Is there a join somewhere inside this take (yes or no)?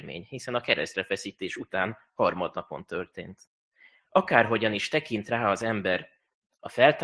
no